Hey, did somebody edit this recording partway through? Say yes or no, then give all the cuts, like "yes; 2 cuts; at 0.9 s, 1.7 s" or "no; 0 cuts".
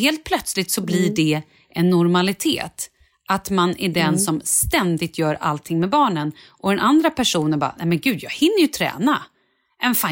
no; 0 cuts